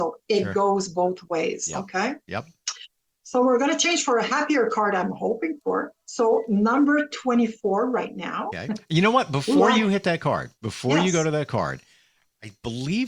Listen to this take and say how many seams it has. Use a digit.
2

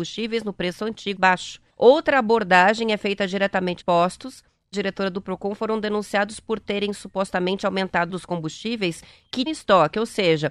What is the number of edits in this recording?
6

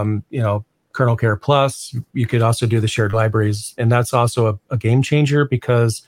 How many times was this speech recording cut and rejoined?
1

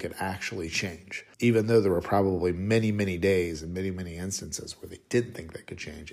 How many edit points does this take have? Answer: 1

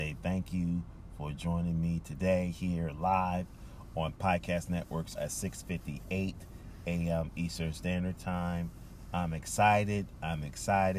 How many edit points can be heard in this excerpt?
1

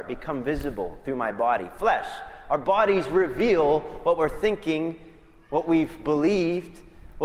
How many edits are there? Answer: 0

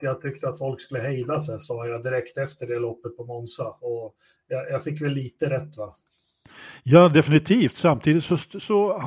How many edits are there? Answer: 0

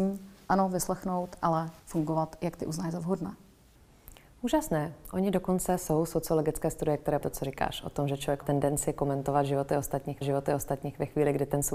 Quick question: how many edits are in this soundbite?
4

